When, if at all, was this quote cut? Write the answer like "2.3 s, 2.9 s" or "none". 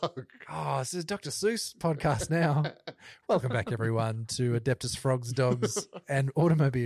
none